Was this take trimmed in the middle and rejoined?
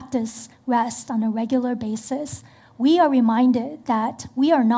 no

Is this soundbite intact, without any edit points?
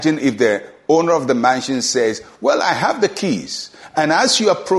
yes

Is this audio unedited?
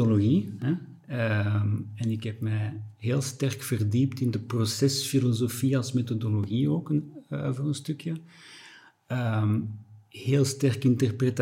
yes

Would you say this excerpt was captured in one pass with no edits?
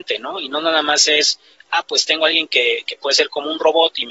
yes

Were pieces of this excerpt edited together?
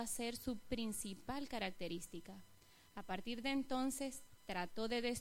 no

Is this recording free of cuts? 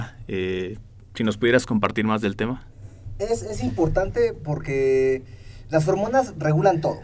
yes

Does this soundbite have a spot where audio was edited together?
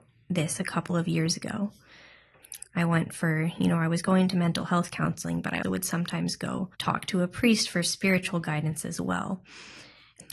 yes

